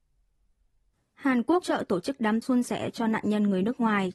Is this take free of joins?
no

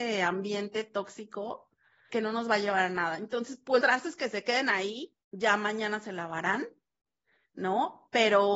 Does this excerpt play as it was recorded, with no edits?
no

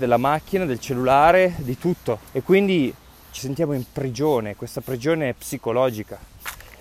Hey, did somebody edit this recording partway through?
yes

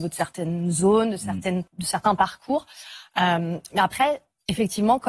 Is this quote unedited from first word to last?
no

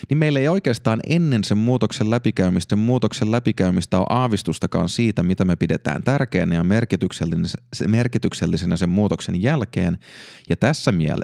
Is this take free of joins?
no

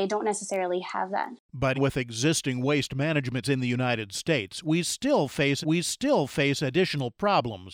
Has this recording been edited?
yes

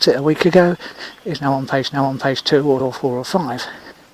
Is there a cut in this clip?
yes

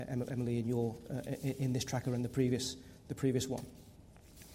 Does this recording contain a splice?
no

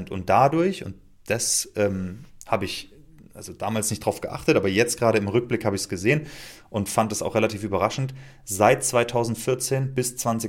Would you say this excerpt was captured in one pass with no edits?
yes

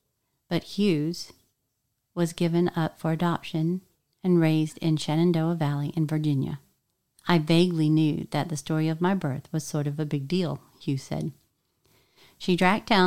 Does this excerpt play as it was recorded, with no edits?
yes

